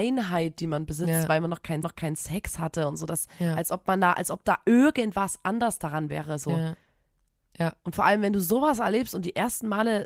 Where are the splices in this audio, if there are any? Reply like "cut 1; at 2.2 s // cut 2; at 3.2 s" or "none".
cut 1; at 1.8 s